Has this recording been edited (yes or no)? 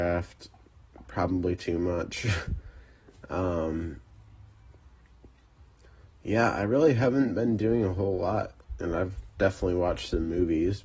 no